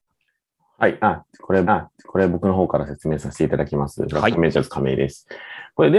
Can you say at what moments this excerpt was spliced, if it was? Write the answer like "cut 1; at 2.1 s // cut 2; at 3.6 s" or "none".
cut 1; at 1.6 s